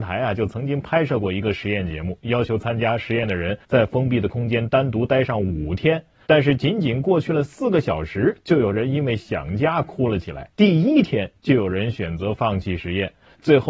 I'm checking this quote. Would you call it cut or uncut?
cut